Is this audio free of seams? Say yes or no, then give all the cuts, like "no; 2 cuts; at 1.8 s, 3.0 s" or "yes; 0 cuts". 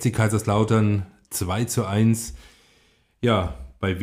yes; 0 cuts